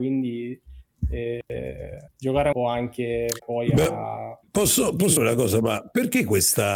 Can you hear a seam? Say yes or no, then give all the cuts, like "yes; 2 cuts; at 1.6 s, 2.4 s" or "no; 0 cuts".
yes; 5 cuts; at 2.1 s, 2.5 s, 3.4 s, 4.5 s, 5.2 s